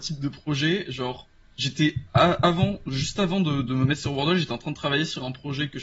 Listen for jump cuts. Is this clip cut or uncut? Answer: uncut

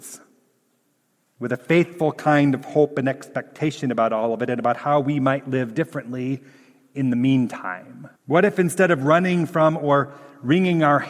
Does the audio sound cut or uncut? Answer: cut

